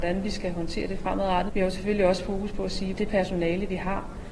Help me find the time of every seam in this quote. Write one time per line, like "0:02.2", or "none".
0:01.5
0:02.9